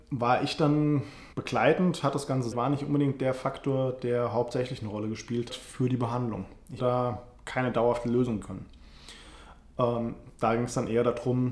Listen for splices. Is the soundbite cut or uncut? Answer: cut